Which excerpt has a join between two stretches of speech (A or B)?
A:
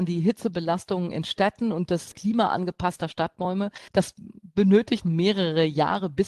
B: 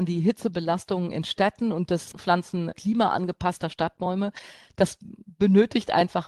A